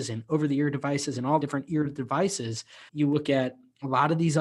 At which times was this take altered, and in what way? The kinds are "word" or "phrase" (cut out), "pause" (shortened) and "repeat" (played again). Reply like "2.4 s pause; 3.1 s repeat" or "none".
1.4 s phrase; 2.9 s pause